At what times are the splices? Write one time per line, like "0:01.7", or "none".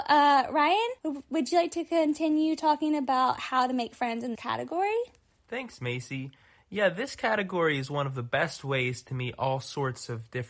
0:01.0
0:04.4